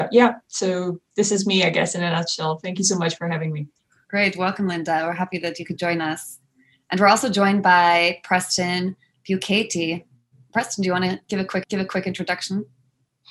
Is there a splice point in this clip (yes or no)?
yes